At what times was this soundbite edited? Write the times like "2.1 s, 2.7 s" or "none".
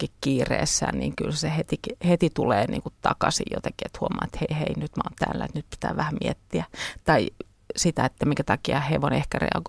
none